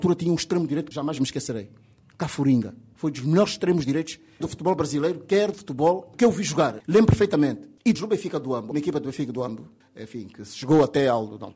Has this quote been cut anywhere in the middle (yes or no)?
yes